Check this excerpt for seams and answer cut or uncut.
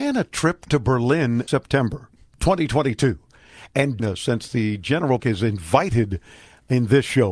cut